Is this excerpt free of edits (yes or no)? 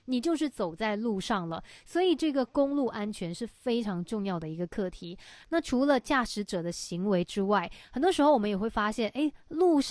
yes